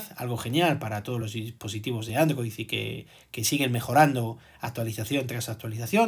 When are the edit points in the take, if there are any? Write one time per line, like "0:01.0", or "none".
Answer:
none

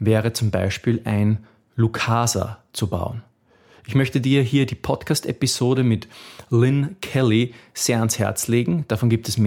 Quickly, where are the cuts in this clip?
none

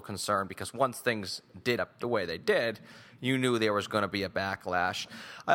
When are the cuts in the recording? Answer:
0:01.8

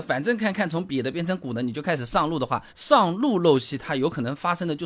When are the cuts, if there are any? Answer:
0:02.7

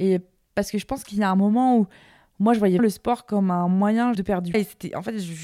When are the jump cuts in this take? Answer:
0:02.8
0:04.1
0:04.5

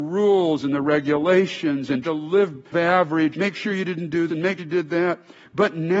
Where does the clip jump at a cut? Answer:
0:02.0
0:02.7
0:03.3
0:04.3
0:04.6

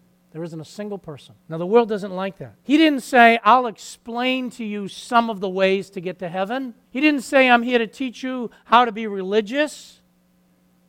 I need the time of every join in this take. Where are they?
0:01.4
0:02.6
0:06.8

